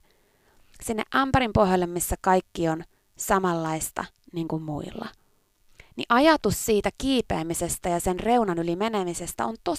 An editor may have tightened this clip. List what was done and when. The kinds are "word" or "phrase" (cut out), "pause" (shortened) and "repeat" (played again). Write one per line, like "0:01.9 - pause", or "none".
none